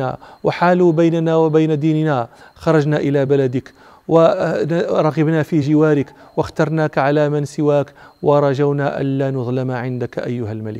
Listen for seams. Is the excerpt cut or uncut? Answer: uncut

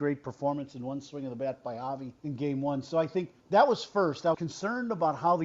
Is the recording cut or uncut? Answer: cut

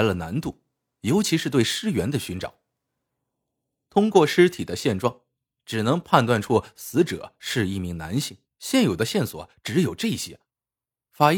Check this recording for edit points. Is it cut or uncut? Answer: cut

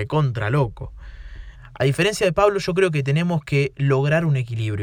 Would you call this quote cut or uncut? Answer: uncut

